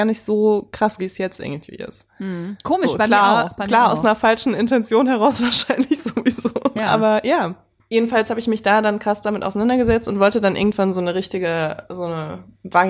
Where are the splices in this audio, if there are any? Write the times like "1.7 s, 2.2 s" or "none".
1.0 s